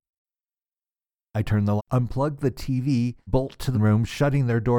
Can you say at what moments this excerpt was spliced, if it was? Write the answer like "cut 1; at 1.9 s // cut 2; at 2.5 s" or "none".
cut 1; at 1.8 s // cut 2; at 3.3 s // cut 3; at 3.7 s